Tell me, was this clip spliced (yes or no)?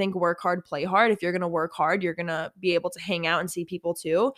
no